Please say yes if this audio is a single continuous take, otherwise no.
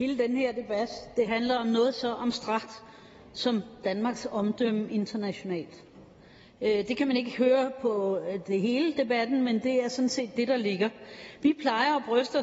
yes